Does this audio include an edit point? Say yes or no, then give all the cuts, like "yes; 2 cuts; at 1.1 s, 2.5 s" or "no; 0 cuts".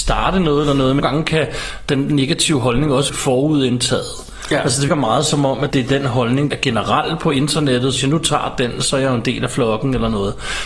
yes; 6 cuts; at 1.0 s, 3.1 s, 4.9 s, 5.7 s, 6.5 s, 8.0 s